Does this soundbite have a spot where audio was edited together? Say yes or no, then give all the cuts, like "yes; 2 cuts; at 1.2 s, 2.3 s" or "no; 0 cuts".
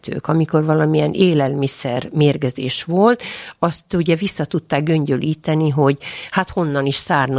no; 0 cuts